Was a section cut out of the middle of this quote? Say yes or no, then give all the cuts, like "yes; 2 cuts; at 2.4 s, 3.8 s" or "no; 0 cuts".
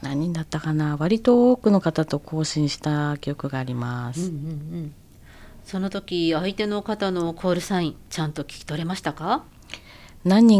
no; 0 cuts